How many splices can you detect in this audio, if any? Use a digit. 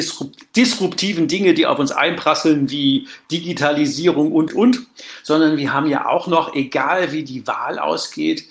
1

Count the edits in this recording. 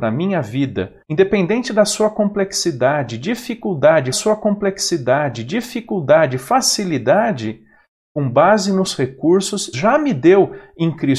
3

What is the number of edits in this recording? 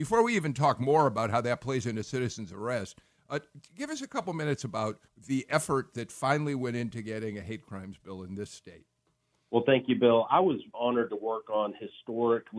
2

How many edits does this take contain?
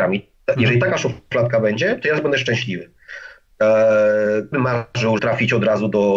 2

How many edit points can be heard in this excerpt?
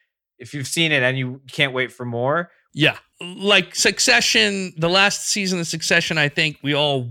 0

